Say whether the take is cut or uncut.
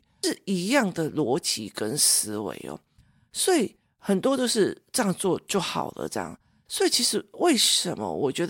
uncut